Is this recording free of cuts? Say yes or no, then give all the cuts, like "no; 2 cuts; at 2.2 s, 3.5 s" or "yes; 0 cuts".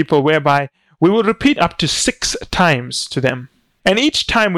no; 1 cut; at 1.6 s